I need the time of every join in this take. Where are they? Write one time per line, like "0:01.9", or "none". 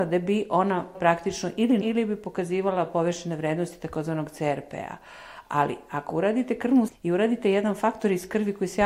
0:00.9
0:01.8
0:06.9